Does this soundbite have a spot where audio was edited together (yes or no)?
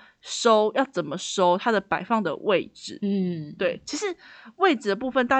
no